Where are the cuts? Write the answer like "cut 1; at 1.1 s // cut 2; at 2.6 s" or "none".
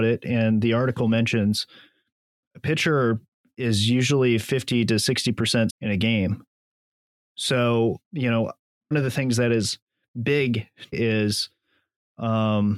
cut 1; at 5.7 s // cut 2; at 8.9 s // cut 3; at 10.9 s